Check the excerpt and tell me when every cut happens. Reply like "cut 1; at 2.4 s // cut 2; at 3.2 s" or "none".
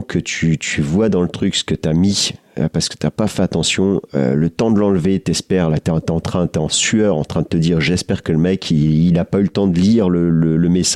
none